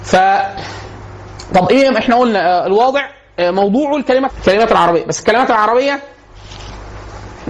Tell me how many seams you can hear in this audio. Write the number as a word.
one